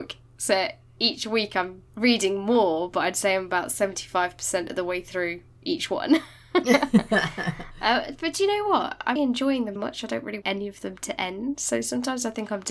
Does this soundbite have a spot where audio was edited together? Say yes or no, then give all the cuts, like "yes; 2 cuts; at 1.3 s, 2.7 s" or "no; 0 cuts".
yes; 4 cuts; at 1.9 s, 9.2 s, 9.8 s, 10.4 s